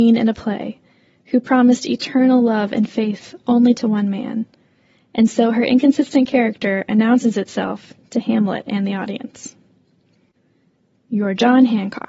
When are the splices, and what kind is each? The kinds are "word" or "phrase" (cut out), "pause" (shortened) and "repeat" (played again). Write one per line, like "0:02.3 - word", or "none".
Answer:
none